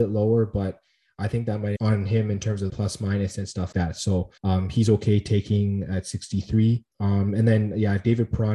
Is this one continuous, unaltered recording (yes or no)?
no